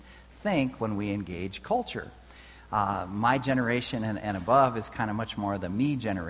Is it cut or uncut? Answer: uncut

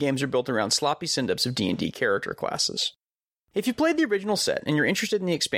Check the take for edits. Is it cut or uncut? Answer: uncut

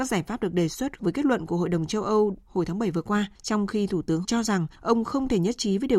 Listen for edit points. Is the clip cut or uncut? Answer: cut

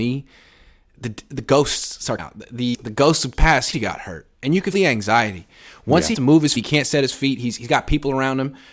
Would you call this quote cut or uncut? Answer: cut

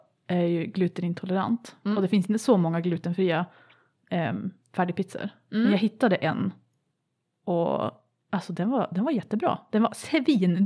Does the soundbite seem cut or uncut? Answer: uncut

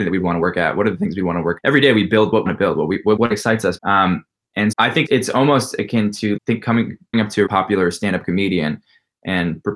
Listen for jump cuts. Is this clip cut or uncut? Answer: cut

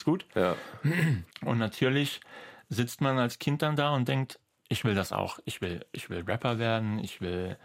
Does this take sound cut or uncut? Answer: cut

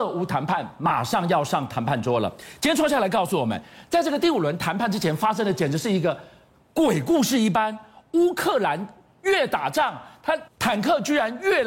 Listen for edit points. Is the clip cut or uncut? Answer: cut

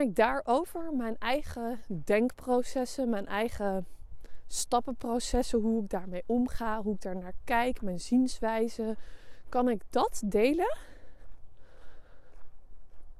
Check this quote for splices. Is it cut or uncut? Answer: uncut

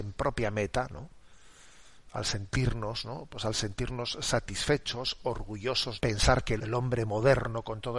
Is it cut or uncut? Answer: cut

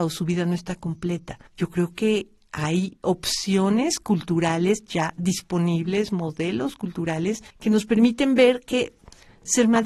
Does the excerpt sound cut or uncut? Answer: cut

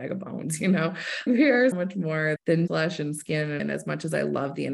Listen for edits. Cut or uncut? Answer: cut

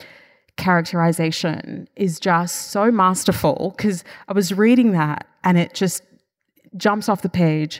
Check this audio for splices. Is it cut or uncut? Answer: uncut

